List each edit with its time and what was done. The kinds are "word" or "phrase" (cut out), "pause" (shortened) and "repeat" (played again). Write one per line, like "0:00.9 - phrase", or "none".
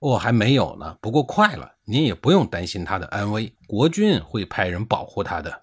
0:03.6 - pause